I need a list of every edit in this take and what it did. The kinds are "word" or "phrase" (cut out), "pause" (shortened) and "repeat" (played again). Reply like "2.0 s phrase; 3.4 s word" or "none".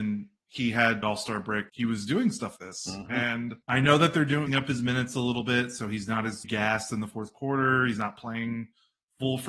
1.0 s phrase; 1.7 s phrase; 2.6 s word; 3.6 s pause; 4.5 s phrase; 6.4 s word